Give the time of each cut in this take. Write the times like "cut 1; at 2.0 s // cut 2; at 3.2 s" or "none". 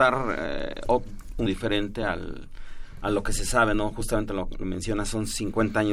cut 1; at 1.5 s